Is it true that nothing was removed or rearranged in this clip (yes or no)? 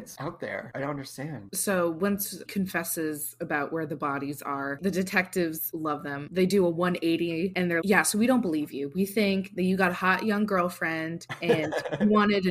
no